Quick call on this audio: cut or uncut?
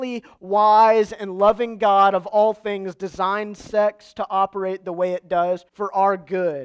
cut